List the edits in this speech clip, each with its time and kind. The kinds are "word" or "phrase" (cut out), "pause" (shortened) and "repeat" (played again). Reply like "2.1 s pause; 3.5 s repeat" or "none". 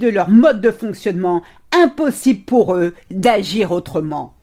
none